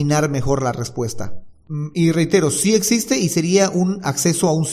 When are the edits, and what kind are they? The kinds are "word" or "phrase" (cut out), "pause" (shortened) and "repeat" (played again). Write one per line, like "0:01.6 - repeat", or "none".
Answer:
none